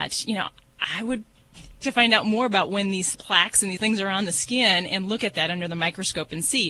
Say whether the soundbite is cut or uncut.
cut